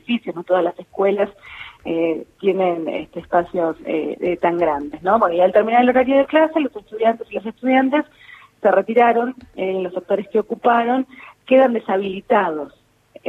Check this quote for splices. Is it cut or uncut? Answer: uncut